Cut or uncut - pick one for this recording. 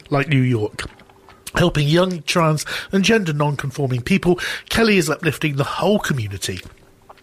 uncut